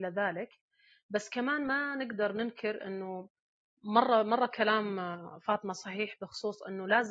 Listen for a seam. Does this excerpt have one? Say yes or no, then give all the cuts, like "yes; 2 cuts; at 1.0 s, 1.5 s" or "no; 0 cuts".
no; 0 cuts